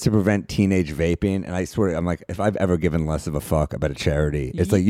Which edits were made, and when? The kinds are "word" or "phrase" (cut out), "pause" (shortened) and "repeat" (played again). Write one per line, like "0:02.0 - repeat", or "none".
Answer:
none